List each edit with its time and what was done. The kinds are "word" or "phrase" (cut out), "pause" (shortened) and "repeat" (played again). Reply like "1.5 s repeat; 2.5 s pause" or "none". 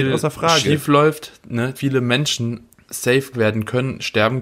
1.7 s word; 3.3 s word